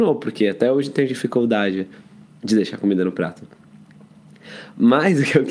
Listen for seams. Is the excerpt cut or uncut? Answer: uncut